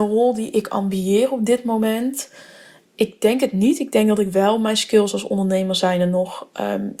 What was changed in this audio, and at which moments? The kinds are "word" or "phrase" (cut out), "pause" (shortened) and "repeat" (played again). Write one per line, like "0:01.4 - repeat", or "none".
none